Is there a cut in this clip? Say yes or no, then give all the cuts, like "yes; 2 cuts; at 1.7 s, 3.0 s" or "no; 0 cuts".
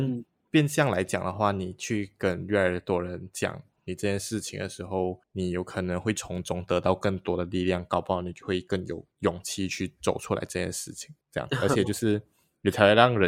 yes; 3 cuts; at 5.2 s, 9.1 s, 11.2 s